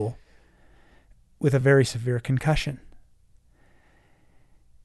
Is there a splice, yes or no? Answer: no